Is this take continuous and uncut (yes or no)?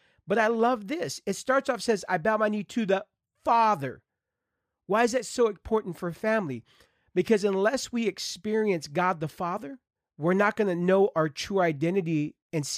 yes